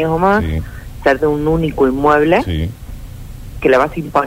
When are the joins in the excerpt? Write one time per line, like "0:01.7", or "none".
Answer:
0:01.2

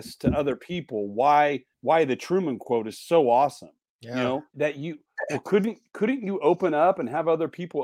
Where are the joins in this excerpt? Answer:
0:01.7
0:03.9
0:04.5

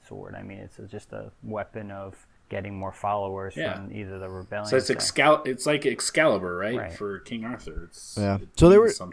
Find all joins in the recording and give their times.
0:02.4

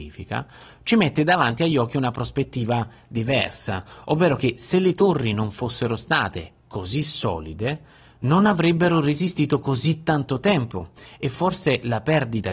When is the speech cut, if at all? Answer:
none

